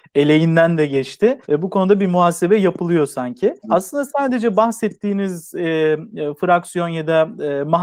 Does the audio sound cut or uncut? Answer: cut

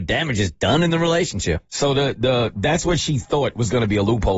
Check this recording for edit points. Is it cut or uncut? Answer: uncut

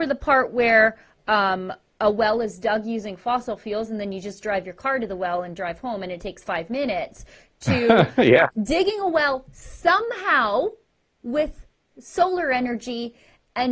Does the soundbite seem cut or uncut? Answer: uncut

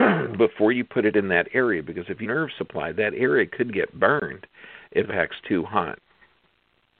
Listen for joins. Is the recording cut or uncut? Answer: cut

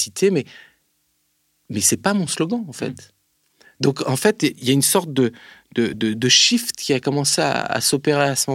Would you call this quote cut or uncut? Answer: uncut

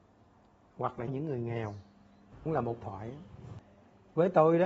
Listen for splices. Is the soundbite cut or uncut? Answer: cut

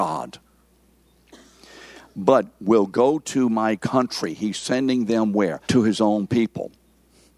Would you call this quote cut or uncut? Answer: cut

